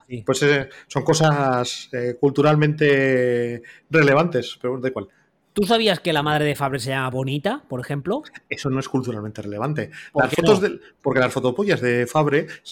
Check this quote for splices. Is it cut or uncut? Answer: uncut